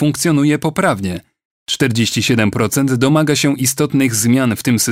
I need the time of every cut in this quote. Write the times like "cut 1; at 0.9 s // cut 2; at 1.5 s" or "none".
none